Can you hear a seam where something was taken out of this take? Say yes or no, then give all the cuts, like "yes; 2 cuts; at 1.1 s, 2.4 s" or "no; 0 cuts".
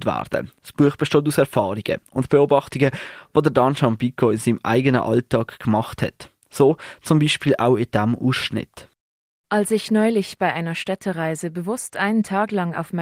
no; 0 cuts